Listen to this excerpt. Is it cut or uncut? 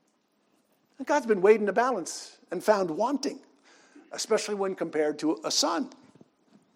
uncut